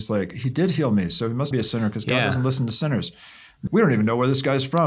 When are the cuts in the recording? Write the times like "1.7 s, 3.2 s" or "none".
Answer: 1.5 s, 3.7 s